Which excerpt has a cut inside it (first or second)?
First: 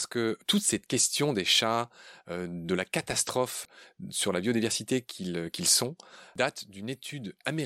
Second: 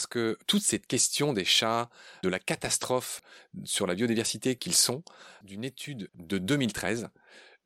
second